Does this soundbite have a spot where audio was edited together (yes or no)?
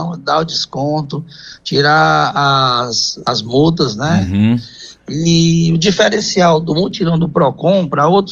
no